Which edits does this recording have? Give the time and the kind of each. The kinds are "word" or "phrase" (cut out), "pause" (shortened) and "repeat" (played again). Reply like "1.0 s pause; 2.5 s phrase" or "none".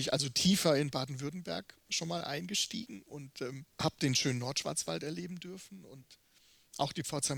3.7 s pause